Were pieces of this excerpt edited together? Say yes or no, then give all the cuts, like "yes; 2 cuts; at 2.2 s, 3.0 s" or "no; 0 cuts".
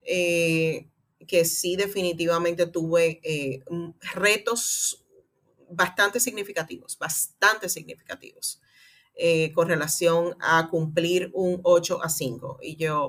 no; 0 cuts